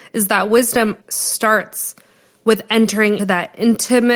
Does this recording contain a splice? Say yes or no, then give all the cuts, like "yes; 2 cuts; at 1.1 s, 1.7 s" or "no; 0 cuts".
yes; 2 cuts; at 1.0 s, 3.2 s